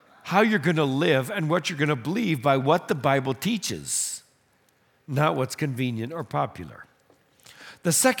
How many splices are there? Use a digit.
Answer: 0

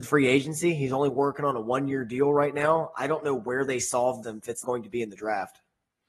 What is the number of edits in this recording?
2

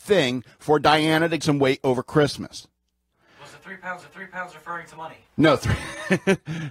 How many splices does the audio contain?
3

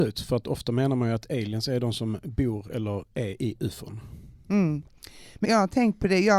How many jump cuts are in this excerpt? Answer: 1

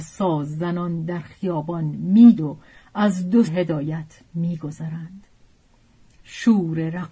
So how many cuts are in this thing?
2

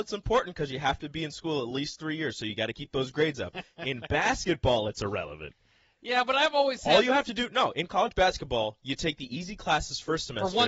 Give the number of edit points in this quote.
0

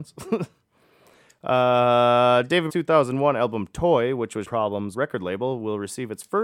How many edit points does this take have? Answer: 3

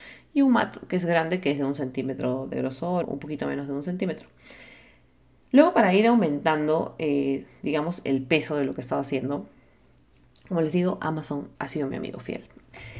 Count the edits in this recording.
2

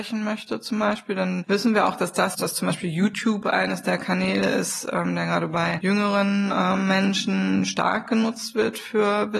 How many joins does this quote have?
1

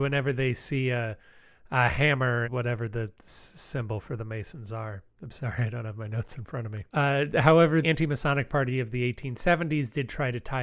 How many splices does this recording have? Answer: 4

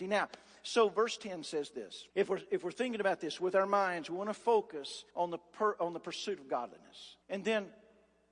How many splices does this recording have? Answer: 3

